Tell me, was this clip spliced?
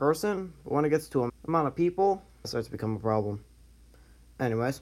yes; 2 cuts; at 1.3 s, 2.4 s

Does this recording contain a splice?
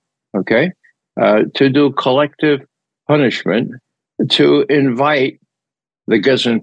no; 0 cuts

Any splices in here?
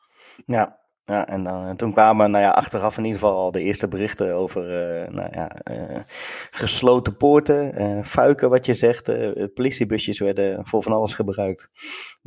no; 0 cuts

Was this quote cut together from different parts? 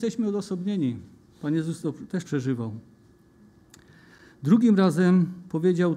yes; 2 cuts; at 1.8 s, 2.2 s

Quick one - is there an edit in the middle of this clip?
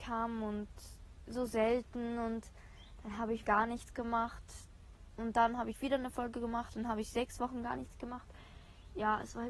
yes; 1 cut; at 3.5 s

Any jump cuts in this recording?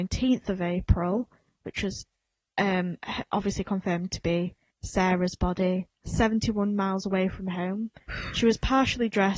yes; 2 cuts; at 4.7 s, 5.9 s

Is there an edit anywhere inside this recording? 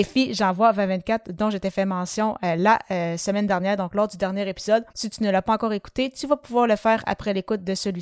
yes; 1 cut; at 4.9 s

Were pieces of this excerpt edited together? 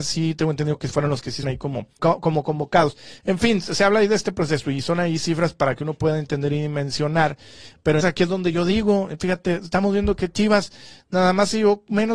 yes; 3 cuts; at 1.4 s, 2.0 s, 8.0 s

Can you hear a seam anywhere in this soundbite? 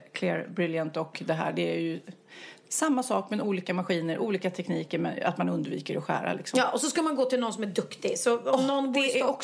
no; 0 cuts

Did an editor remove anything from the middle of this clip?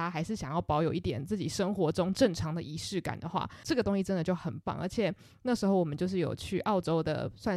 no; 0 cuts

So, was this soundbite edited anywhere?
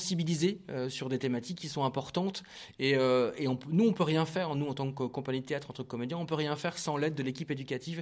no; 0 cuts

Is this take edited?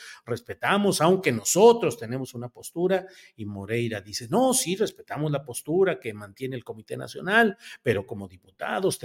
no; 0 cuts

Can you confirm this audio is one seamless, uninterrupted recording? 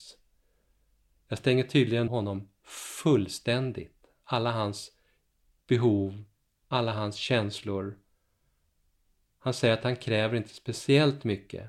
no; 1 cut; at 2.1 s

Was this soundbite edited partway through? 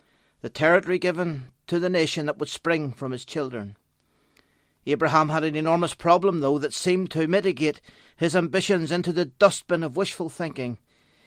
no; 0 cuts

